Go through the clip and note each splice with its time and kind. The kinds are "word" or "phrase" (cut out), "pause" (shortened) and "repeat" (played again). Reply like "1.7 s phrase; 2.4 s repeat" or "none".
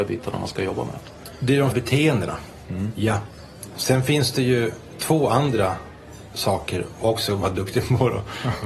1.7 s word